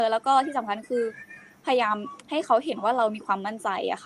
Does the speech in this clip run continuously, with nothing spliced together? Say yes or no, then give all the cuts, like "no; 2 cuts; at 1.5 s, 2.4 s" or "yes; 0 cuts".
yes; 0 cuts